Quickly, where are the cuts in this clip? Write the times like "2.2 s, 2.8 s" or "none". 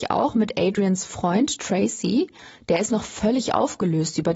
none